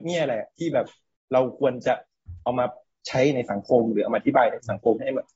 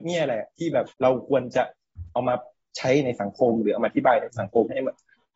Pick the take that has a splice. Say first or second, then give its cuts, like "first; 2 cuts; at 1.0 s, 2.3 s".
second; 1 cut; at 0.9 s